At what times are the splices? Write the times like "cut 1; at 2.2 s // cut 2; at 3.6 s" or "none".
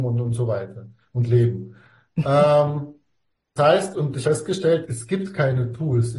cut 1; at 3.6 s // cut 2; at 3.9 s // cut 3; at 4.2 s // cut 4; at 4.9 s